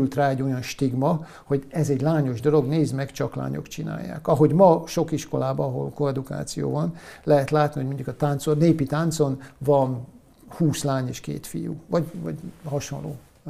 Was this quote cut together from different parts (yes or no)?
no